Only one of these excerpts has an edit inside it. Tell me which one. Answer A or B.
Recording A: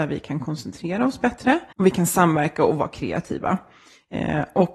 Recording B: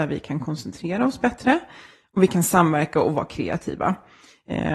A